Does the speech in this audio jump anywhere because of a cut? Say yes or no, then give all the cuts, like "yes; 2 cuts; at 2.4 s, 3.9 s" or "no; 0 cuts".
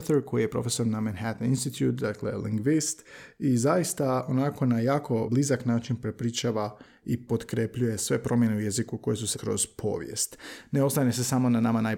yes; 3 cuts; at 5.3 s, 7.3 s, 9.3 s